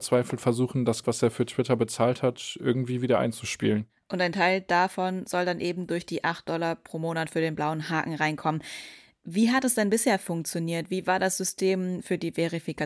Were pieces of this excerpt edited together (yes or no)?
yes